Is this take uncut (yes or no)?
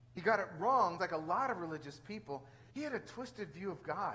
no